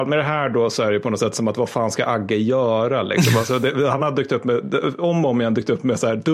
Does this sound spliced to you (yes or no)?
no